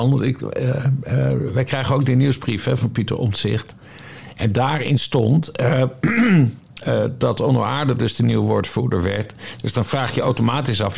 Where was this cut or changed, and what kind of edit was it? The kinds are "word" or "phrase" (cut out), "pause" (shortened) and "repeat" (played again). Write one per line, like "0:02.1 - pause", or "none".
0:06.8 - word